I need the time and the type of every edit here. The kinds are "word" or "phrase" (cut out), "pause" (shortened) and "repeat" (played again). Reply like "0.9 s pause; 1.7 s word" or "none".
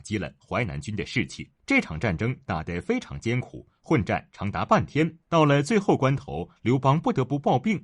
1.6 s pause; 5.2 s pause